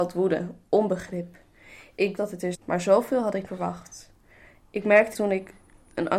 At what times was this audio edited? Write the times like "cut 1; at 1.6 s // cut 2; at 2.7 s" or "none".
cut 1; at 2.2 s // cut 2; at 2.5 s // cut 3; at 3.5 s // cut 4; at 5.1 s

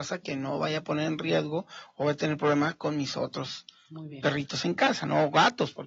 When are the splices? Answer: none

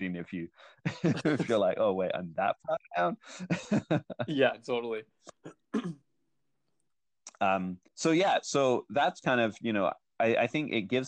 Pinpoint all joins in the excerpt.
cut 1; at 6.0 s // cut 2; at 7.9 s

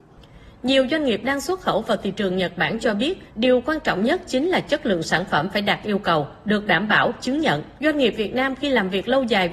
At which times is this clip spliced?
cut 1; at 3.3 s // cut 2; at 7.8 s

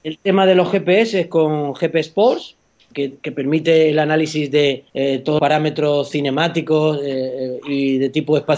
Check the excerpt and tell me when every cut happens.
cut 1; at 2.9 s // cut 2; at 4.9 s // cut 3; at 5.4 s

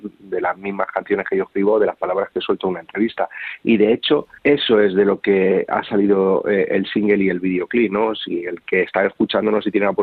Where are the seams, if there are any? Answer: cut 1; at 4.4 s

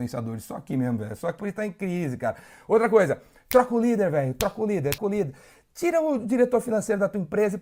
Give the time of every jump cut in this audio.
cut 1; at 1.4 s // cut 2; at 5.0 s

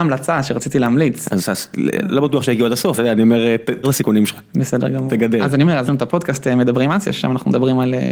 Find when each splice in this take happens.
cut 1; at 3.0 s // cut 2; at 3.8 s // cut 3; at 5.9 s

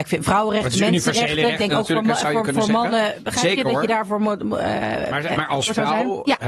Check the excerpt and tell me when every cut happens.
none

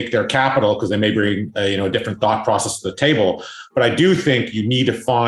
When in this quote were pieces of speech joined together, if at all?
none

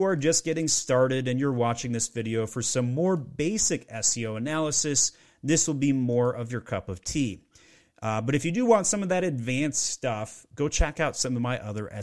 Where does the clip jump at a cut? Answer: none

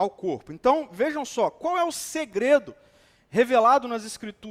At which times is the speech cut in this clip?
none

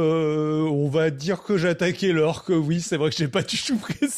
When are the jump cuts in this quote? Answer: none

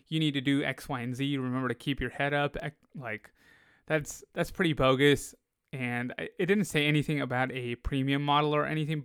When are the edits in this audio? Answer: none

